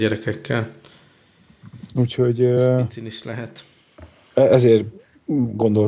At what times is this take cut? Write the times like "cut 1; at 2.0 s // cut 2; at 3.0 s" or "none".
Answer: none